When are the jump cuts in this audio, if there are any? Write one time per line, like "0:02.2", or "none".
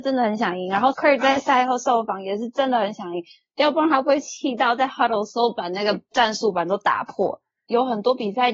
0:00.9